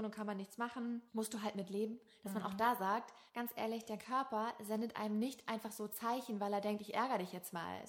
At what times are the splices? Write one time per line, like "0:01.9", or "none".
0:01.1
0:03.3

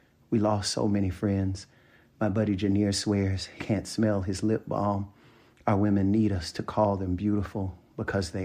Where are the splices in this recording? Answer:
0:03.6

